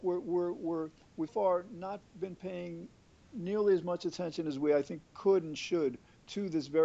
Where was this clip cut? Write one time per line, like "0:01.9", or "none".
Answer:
0:01.3

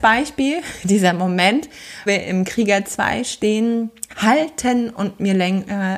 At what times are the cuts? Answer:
0:02.1
0:04.1

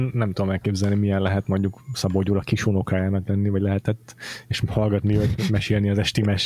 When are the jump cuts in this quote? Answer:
none

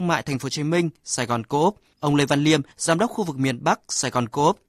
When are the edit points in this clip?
0:02.7

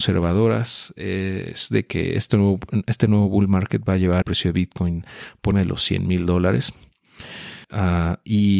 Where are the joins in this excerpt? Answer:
0:04.2
0:05.5
0:07.6

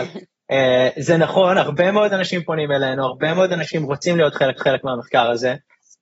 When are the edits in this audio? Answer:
0:04.6

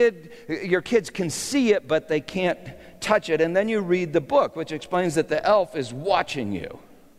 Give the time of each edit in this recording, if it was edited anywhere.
none

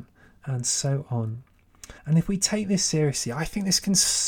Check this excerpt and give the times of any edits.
0:02.0

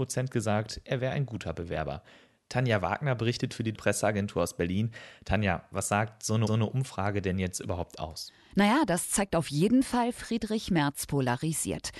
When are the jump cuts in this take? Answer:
0:03.7
0:06.5

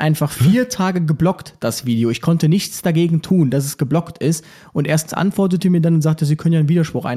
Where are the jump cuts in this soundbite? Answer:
0:05.1

